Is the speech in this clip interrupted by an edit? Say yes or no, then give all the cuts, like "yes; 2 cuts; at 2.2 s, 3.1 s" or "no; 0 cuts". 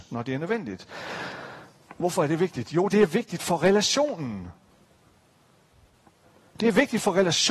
no; 0 cuts